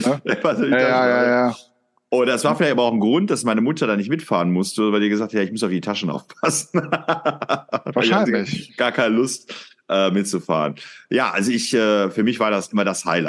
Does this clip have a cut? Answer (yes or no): no